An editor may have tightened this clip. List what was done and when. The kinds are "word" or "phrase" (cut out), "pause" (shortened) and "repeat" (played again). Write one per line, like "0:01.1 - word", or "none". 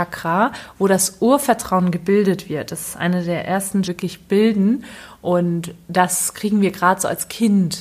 0:03.8 - phrase